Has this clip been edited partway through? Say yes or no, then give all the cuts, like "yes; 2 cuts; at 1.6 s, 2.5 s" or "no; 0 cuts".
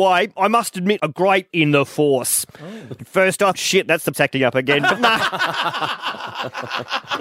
yes; 4 cuts; at 1.0 s, 1.5 s, 3.5 s, 4.1 s